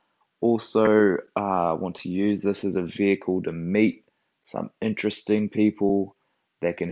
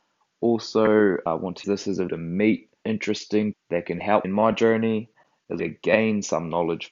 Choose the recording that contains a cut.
second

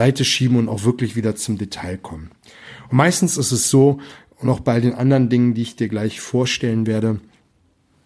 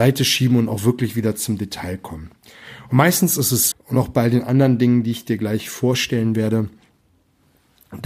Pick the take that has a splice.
second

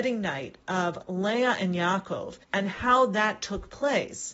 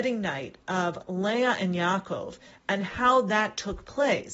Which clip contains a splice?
first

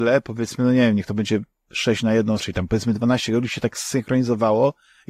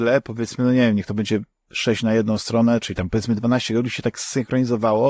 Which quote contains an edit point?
first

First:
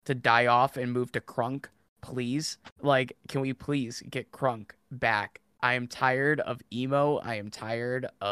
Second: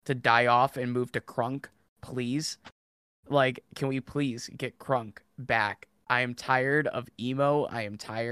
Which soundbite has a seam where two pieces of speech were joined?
first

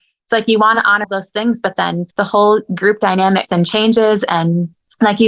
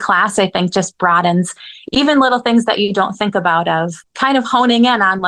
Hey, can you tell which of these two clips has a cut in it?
first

